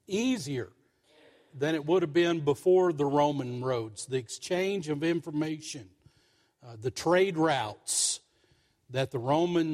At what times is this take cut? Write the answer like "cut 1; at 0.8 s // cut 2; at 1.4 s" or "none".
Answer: none